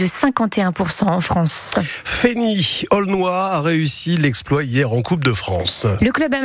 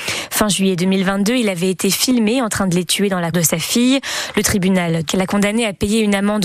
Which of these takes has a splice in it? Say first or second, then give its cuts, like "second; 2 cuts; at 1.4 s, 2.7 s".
second; 2 cuts; at 3.3 s, 5.1 s